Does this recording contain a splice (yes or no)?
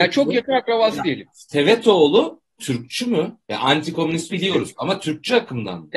yes